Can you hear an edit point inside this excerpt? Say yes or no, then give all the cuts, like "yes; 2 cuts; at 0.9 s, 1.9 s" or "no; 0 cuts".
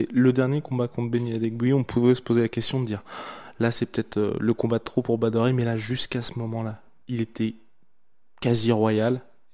no; 0 cuts